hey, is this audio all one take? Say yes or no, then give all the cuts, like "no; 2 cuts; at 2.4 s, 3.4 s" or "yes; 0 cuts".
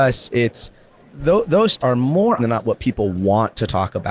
no; 3 cuts; at 1.0 s, 1.8 s, 2.4 s